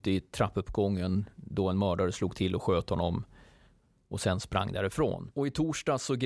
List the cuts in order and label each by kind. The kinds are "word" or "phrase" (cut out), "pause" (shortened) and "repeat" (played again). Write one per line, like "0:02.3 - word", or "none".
none